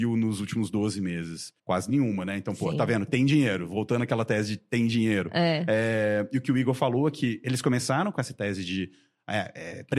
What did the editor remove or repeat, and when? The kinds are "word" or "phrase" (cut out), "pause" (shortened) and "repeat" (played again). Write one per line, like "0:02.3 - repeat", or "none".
0:01.6 - pause